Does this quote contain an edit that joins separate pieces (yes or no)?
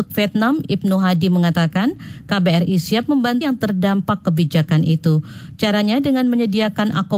yes